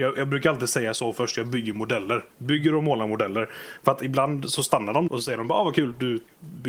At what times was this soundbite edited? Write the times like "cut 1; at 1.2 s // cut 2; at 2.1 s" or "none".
cut 1; at 2.3 s // cut 2; at 5.1 s